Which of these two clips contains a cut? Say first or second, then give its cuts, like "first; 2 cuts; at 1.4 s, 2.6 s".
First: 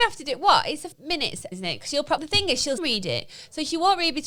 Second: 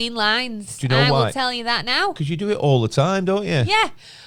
first; 4 cuts; at 0.9 s, 1.5 s, 2.2 s, 2.8 s